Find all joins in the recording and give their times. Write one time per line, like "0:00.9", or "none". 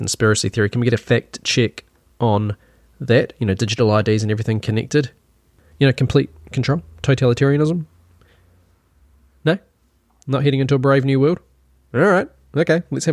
none